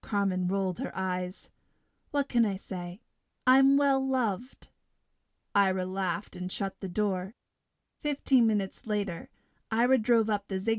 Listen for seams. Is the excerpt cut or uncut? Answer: uncut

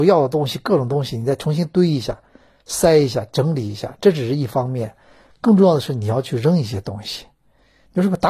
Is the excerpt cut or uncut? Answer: uncut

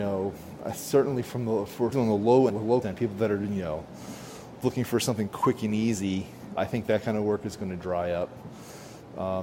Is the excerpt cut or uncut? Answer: cut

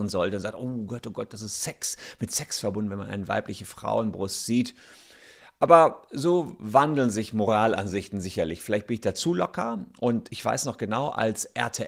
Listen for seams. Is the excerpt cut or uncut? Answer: uncut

